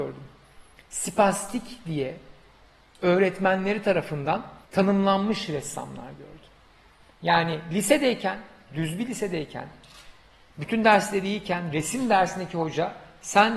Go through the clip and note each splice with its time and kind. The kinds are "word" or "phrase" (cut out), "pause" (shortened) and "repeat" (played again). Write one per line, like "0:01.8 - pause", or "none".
0:04.6 - pause